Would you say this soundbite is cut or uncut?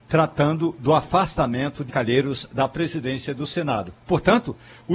cut